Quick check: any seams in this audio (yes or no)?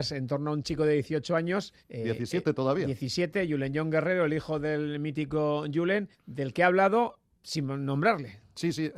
yes